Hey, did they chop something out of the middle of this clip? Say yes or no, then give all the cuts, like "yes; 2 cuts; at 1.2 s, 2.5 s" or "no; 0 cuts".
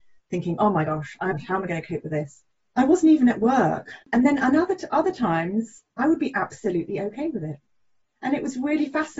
yes; 3 cuts; at 1.3 s, 4.0 s, 5.9 s